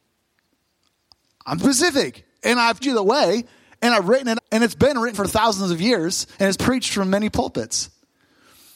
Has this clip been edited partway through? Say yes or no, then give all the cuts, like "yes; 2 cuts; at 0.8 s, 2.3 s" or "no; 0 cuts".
yes; 5 cuts; at 1.6 s, 2.8 s, 4.4 s, 5.1 s, 6.6 s